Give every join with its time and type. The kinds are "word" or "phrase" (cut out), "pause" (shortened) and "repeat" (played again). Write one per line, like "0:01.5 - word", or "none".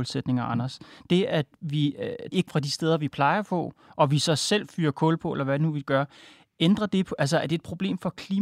0:02.5 - phrase